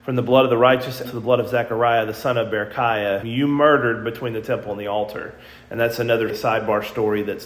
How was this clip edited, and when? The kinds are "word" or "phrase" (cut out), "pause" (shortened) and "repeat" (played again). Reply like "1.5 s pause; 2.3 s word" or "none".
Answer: 1.0 s word; 3.2 s word; 6.3 s word